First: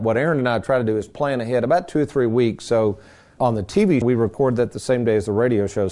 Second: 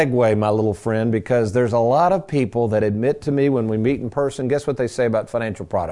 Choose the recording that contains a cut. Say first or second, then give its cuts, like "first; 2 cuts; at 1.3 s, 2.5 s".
first; 2 cuts; at 3.4 s, 4.0 s